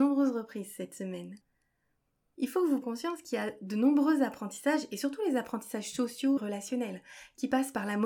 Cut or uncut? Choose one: cut